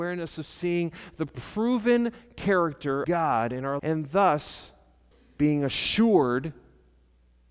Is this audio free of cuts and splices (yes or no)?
no